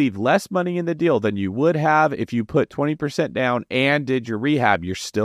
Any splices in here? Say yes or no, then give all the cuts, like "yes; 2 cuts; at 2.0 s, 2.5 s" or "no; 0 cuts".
no; 0 cuts